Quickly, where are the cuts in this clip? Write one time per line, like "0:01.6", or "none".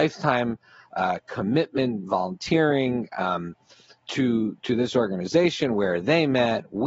none